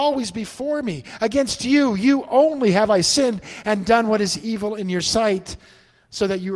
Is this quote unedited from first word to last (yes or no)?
yes